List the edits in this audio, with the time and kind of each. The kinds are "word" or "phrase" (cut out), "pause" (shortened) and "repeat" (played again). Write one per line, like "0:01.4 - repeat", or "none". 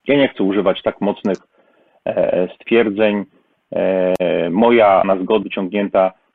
0:05.0 - word
0:05.4 - word